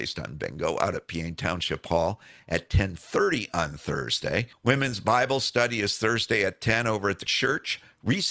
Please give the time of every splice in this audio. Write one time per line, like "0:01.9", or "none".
0:04.5
0:07.3